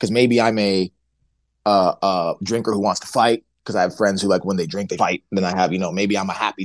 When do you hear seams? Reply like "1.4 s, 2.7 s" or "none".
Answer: 5.0 s